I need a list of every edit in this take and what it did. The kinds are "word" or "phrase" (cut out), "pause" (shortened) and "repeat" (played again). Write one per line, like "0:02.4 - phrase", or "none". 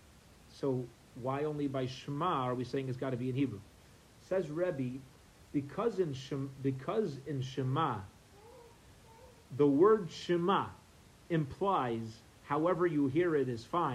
none